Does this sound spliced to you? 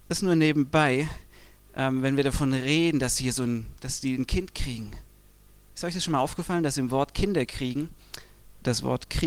no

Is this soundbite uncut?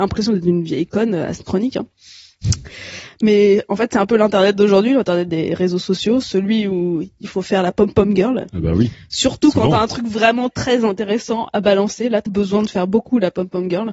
no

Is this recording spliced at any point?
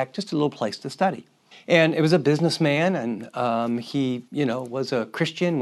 yes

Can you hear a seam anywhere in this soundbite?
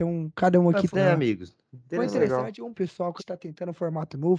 yes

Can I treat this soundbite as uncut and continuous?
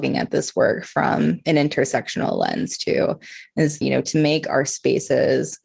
no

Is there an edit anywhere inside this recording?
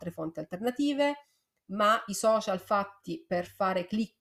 no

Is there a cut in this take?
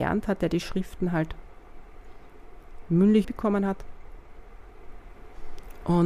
yes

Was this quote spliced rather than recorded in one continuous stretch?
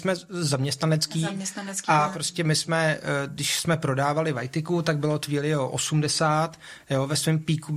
no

